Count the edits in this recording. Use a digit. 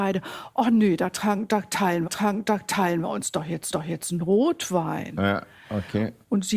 2